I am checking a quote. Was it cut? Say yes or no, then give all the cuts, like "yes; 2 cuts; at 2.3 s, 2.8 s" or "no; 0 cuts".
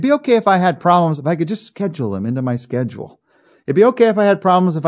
no; 0 cuts